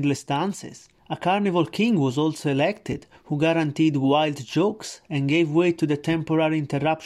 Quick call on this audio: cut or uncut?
cut